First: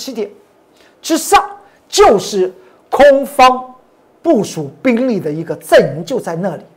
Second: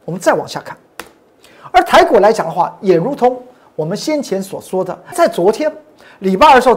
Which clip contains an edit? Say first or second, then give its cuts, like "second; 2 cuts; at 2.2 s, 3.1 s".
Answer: second; 1 cut; at 5.1 s